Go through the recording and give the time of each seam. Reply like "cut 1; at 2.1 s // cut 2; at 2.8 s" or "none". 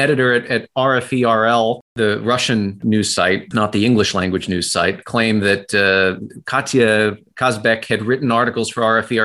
none